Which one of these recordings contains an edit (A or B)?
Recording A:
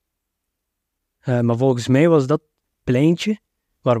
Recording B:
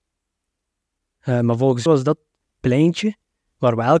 B